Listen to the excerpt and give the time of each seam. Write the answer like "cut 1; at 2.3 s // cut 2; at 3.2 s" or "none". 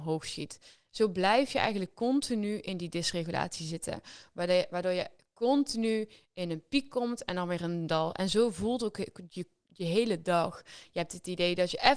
none